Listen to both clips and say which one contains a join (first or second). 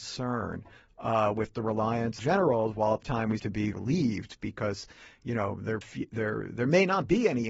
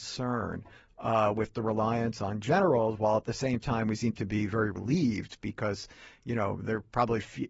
first